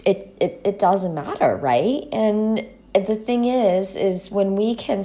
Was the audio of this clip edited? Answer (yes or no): yes